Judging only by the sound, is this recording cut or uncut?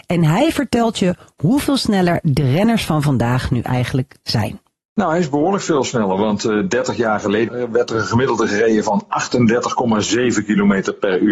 uncut